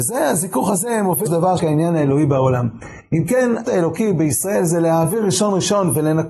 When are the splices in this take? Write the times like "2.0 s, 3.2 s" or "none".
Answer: 1.3 s, 1.6 s, 3.6 s